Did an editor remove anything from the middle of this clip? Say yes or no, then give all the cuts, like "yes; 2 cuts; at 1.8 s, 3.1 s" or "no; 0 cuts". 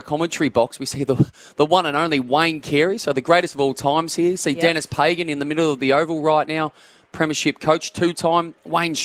no; 0 cuts